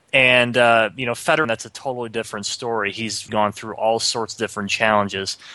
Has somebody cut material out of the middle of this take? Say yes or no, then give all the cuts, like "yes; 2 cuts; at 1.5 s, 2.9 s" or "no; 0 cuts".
yes; 2 cuts; at 1.4 s, 3.3 s